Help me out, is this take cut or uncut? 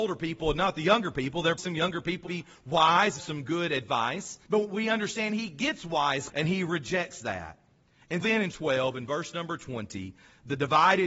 cut